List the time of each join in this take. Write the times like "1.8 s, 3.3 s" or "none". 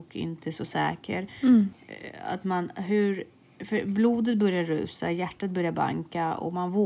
none